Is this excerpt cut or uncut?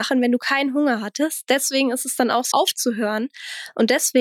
cut